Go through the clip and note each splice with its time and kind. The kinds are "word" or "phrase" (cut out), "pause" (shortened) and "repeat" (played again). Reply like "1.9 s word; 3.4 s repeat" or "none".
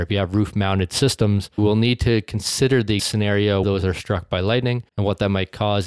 1.6 s word; 3.0 s word; 3.6 s word; 4.9 s pause